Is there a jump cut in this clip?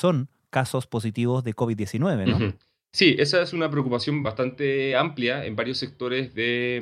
no; 0 cuts

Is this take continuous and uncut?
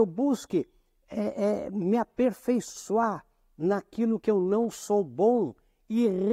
yes; 0 cuts

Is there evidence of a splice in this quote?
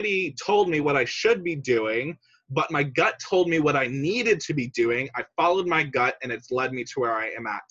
no; 0 cuts

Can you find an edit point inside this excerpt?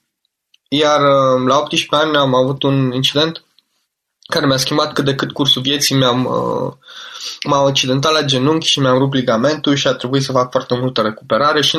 no; 0 cuts

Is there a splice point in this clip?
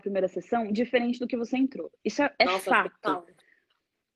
yes; 1 cut; at 1.9 s

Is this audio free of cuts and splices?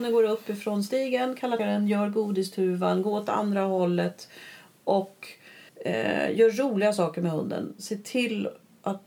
no; 2 cuts; at 1.6 s, 5.7 s

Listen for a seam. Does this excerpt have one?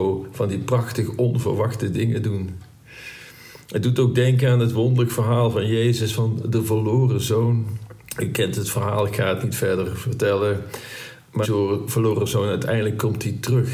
yes; 2 cuts; at 8.0 s, 11.4 s

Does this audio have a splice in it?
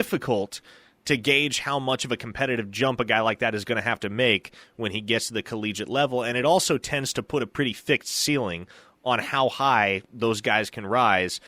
no; 0 cuts

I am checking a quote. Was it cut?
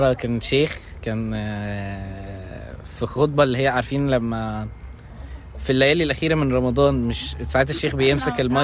no; 0 cuts

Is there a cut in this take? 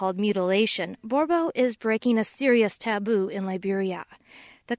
no; 0 cuts

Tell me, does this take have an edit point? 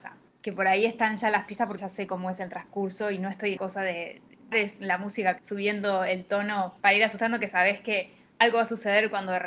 yes; 5 cuts; at 1.8 s, 3.6 s, 4.5 s, 5.4 s, 6.8 s

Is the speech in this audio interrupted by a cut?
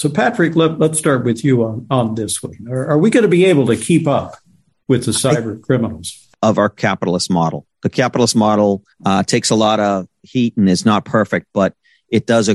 yes; 2 cuts; at 6.3 s, 8.9 s

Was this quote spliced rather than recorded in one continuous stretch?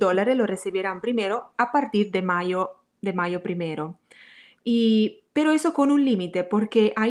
no; 0 cuts

